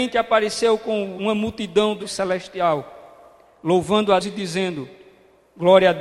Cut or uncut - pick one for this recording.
cut